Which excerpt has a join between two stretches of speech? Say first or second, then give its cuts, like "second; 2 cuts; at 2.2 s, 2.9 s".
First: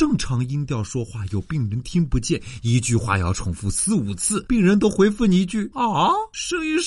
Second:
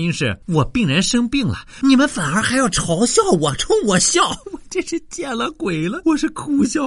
second; 1 cut; at 1.8 s